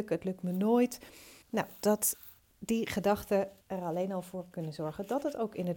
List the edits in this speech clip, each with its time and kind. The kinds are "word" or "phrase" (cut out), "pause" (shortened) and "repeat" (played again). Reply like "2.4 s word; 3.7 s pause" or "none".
1.4 s pause; 2.5 s pause; 3.6 s pause